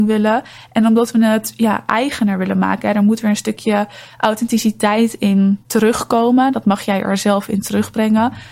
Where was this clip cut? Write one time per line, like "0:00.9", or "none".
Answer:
none